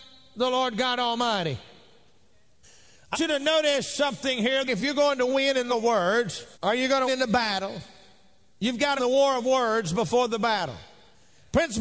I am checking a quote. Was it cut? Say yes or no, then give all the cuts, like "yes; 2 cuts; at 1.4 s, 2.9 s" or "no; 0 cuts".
yes; 5 cuts; at 3.1 s, 5.7 s, 6.5 s, 7.1 s, 9.0 s